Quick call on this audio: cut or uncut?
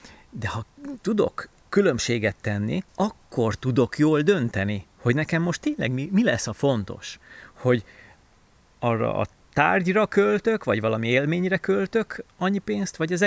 cut